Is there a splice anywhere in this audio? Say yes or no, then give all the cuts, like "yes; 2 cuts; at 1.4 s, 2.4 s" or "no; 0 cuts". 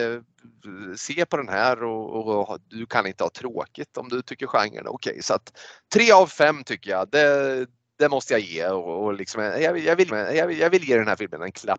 yes; 1 cut; at 10.1 s